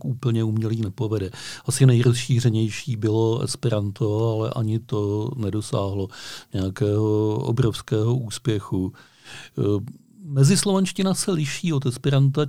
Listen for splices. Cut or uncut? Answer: uncut